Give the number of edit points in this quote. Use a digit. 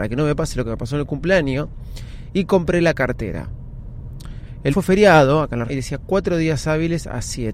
2